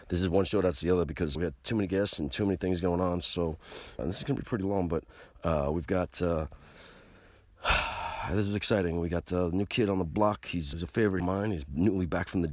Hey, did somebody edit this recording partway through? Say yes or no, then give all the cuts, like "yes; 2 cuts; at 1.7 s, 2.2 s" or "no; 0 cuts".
yes; 4 cuts; at 1.3 s, 4.0 s, 10.7 s, 11.2 s